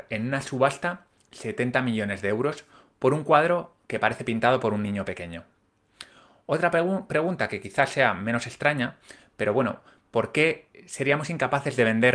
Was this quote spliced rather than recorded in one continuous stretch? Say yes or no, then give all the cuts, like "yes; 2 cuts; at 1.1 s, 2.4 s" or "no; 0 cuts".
no; 0 cuts